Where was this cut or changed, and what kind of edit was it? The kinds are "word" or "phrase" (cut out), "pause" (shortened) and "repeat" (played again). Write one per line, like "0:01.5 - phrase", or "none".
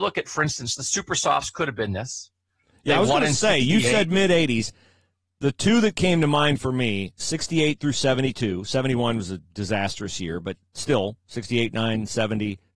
none